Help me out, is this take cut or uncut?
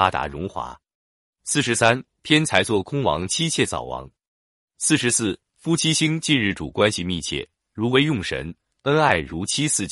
uncut